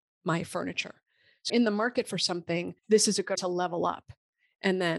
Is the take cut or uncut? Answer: cut